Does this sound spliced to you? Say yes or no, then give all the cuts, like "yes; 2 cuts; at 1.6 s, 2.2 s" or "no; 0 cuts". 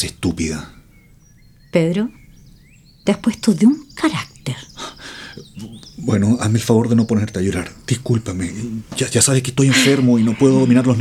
no; 0 cuts